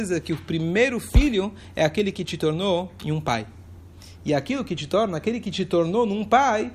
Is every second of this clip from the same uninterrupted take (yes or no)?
yes